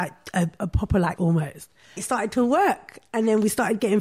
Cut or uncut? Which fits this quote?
cut